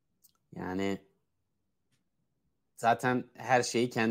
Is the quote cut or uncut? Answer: uncut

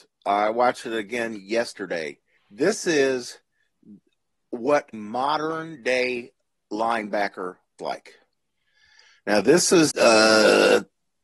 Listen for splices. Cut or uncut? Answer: cut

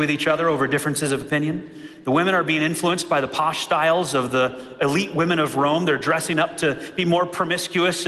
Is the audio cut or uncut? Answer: uncut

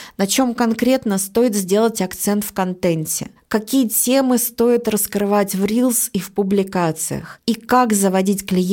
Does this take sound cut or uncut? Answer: uncut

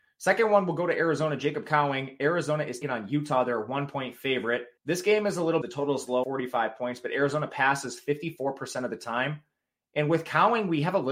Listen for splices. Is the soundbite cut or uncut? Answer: cut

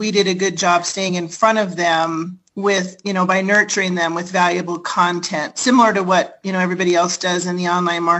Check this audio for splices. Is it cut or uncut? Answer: uncut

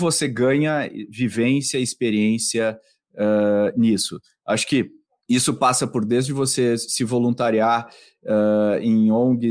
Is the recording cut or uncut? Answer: uncut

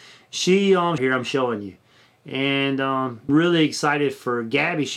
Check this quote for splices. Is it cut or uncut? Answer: cut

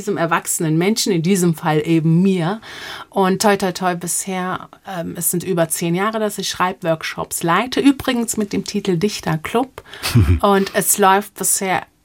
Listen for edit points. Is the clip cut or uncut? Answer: uncut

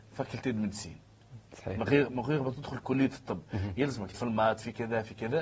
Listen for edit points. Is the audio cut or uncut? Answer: cut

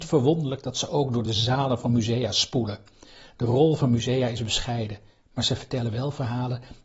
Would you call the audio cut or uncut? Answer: uncut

